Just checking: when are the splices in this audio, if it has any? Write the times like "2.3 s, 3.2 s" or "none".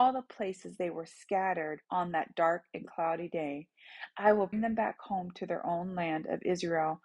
1.8 s, 4.5 s